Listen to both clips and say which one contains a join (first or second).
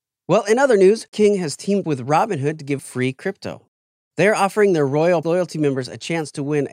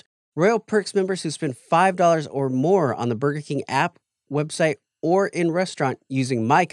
first